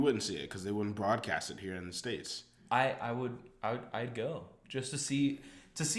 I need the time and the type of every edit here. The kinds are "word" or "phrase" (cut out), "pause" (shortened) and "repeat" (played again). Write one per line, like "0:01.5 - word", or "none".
none